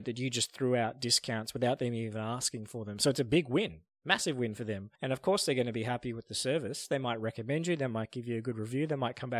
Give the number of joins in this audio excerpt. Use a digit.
1